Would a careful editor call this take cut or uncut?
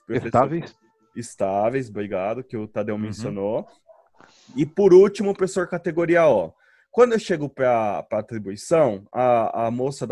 uncut